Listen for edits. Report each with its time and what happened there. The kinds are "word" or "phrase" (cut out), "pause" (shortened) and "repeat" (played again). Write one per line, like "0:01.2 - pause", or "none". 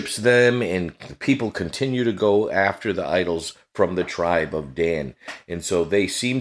none

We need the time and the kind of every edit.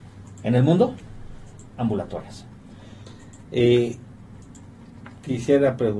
0:01.7 - word

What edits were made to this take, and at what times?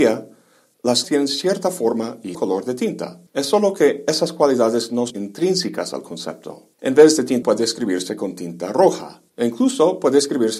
0:01.0 - word
0:02.3 - word
0:03.3 - pause
0:05.1 - word
0:06.7 - pause
0:07.4 - word
0:09.3 - pause

